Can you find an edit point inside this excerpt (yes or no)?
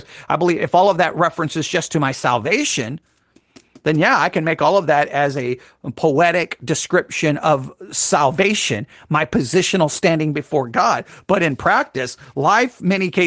no